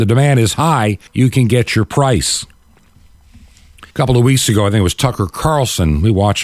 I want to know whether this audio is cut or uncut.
cut